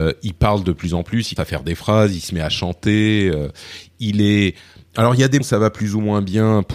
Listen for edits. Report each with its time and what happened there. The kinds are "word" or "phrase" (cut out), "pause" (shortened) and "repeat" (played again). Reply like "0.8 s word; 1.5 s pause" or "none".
1.4 s word; 5.4 s word